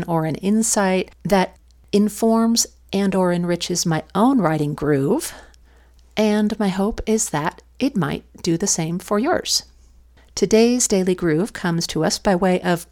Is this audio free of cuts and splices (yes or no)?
yes